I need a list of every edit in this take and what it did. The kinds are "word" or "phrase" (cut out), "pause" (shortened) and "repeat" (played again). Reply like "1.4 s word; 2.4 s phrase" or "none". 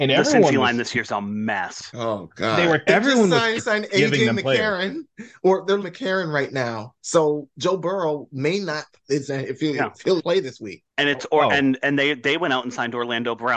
2.9 s word; 3.6 s phrase; 5.8 s phrase; 9.3 s phrase; 10.2 s word; 10.9 s pause